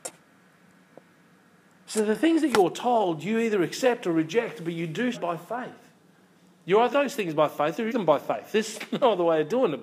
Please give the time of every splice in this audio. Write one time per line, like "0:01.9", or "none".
0:05.1
0:06.9
0:07.9